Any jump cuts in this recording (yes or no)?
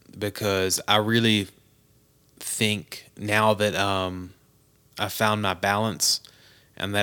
no